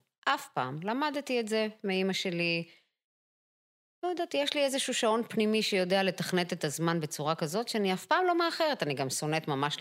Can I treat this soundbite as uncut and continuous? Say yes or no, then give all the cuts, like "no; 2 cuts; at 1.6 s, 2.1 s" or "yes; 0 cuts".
yes; 0 cuts